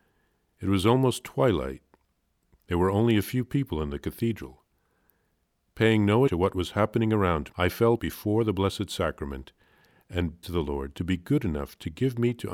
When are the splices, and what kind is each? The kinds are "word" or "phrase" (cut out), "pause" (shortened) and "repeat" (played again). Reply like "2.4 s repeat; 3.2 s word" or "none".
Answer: 6.3 s word; 7.5 s word; 8.0 s word; 10.4 s word